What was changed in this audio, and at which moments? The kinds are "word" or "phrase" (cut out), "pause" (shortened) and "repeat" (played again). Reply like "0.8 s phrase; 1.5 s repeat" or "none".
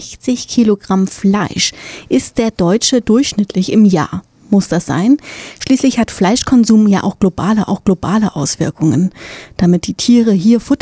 7.7 s repeat